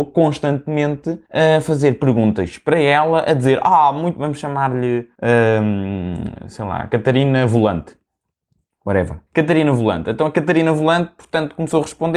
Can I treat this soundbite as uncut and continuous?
no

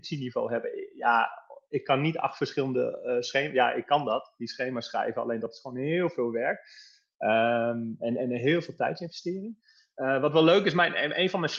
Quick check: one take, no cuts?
yes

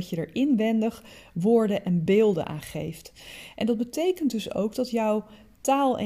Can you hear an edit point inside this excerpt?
no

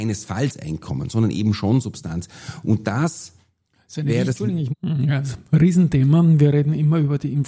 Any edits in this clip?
no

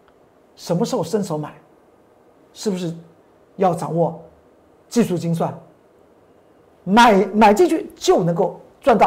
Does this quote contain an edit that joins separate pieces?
no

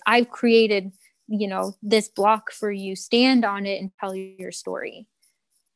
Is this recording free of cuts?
yes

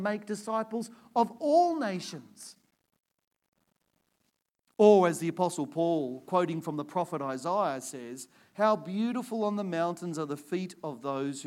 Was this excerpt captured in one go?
yes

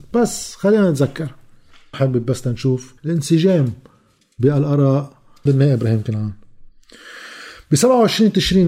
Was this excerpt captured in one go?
no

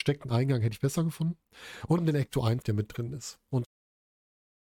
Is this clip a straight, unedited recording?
no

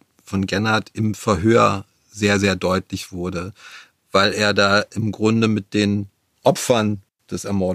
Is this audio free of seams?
yes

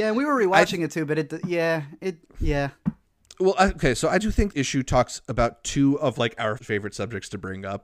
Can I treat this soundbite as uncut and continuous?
no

